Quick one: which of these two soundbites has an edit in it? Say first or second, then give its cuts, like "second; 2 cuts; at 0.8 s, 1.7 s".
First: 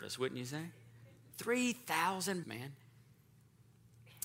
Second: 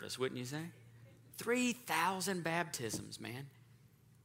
first; 1 cut; at 2.4 s